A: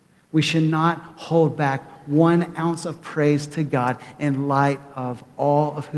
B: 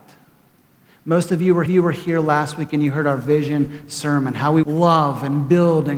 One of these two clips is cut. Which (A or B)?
B